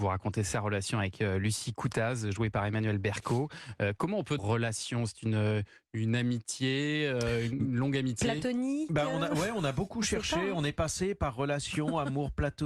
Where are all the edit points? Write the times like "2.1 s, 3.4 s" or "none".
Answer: 4.4 s